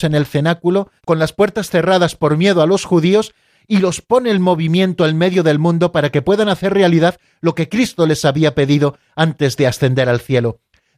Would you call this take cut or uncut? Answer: cut